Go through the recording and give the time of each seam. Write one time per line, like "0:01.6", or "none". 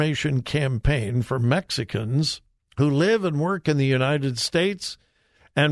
0:02.6